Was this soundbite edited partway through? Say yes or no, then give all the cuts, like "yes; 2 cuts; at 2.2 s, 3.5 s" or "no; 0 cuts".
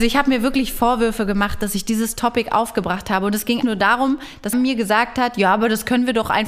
yes; 2 cuts; at 3.6 s, 4.5 s